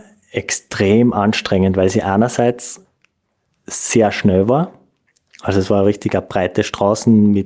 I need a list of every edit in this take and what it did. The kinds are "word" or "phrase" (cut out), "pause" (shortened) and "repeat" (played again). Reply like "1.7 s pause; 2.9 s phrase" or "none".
none